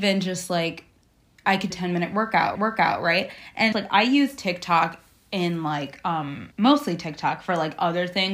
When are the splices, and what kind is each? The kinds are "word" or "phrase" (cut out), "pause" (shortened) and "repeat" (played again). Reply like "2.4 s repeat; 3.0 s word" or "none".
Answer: 1.7 s phrase; 2.6 s repeat; 3.7 s word; 6.5 s pause